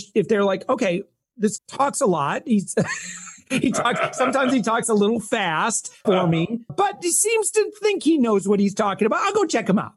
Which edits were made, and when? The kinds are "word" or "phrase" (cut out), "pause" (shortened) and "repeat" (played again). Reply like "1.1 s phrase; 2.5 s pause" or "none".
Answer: 1.6 s word; 6.0 s word; 6.7 s word